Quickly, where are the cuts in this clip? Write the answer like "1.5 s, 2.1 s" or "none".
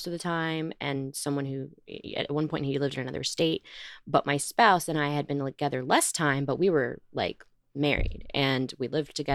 none